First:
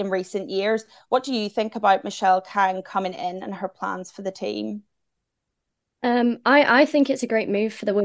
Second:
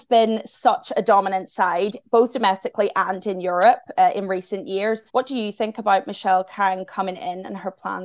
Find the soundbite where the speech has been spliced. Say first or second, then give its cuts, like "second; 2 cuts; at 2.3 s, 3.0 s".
second; 1 cut; at 5.1 s